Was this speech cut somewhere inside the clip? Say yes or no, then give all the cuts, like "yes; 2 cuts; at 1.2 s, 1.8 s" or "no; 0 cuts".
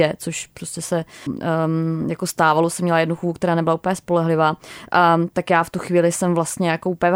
yes; 1 cut; at 1.3 s